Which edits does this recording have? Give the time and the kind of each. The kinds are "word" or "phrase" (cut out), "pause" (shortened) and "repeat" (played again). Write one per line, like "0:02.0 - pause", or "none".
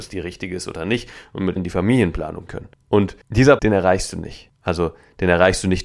0:01.6 - word
0:02.5 - word
0:03.6 - word